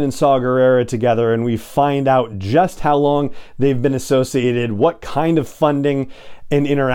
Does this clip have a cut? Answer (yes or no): no